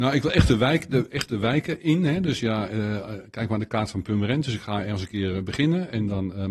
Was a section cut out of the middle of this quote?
no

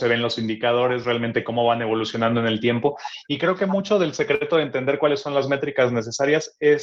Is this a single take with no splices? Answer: yes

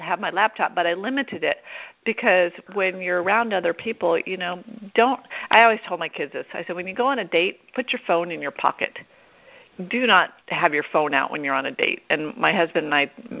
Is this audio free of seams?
no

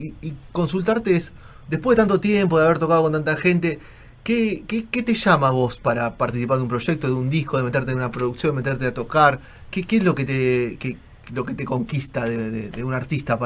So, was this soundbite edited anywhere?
no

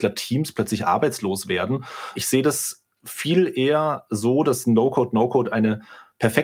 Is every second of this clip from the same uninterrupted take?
yes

